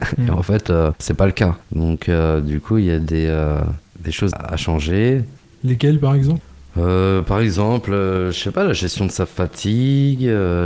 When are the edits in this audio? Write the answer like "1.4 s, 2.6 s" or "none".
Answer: 4.3 s